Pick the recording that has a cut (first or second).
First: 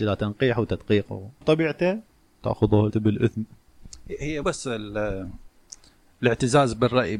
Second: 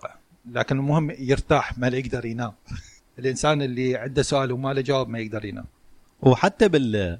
first